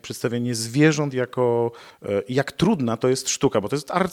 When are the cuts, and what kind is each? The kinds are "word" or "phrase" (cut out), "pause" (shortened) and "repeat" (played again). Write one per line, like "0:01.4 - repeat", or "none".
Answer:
none